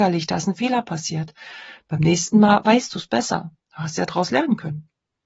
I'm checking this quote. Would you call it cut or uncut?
cut